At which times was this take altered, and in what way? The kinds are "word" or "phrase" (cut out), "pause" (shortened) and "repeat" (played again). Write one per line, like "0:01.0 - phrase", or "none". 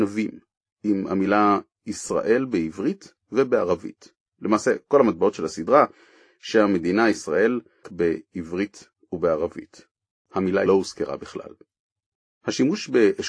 0:07.8 - phrase
0:10.7 - phrase